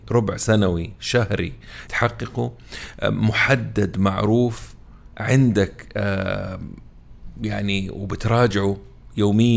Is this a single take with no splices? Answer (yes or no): no